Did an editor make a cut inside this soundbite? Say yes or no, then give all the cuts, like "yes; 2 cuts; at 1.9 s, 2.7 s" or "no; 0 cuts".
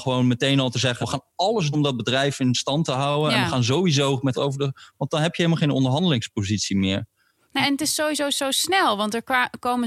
yes; 4 cuts; at 1.0 s, 1.7 s, 4.3 s, 7.6 s